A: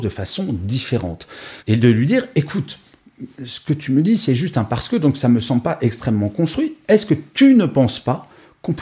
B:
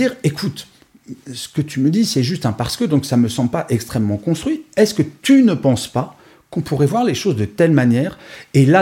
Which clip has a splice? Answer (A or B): A